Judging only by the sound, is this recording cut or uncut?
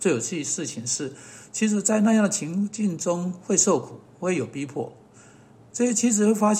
uncut